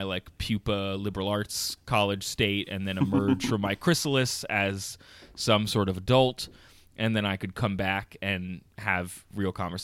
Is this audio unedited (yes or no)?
yes